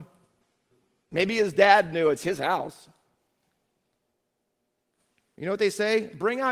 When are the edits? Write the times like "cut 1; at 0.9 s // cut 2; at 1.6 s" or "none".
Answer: none